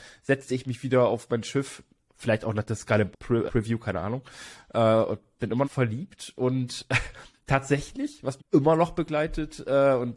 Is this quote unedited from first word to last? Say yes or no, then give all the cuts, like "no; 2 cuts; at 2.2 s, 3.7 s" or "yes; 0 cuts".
no; 4 cuts; at 3.1 s, 3.5 s, 5.6 s, 8.4 s